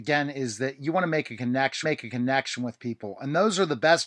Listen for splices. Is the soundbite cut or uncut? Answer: cut